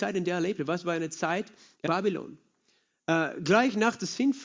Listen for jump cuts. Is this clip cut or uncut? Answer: cut